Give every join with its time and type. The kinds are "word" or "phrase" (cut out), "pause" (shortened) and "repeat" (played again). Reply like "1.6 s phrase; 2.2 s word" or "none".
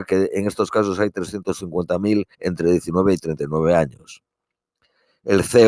2.3 s pause